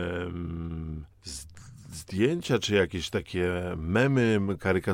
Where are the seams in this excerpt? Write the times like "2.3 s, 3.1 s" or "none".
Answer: 1.1 s